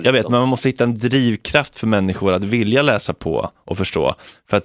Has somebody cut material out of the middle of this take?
no; 0 cuts

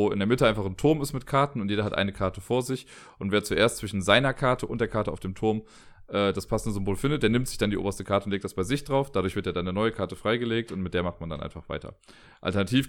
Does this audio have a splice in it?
no; 0 cuts

